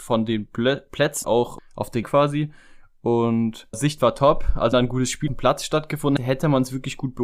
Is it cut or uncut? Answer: cut